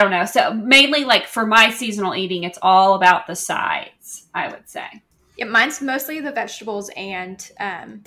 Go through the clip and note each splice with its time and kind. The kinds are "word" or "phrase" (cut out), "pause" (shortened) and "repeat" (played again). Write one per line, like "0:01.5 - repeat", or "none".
none